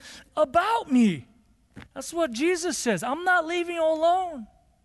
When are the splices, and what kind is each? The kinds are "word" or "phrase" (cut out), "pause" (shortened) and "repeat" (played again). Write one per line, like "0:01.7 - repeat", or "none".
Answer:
0:01.9 - pause